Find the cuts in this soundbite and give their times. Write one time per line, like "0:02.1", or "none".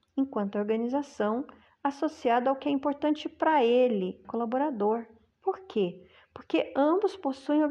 0:04.2